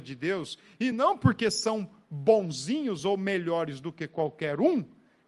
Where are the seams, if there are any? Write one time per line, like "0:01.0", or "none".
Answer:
none